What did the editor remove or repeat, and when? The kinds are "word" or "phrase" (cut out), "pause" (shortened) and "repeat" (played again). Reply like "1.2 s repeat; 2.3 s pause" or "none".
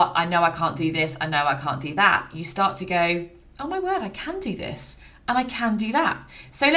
none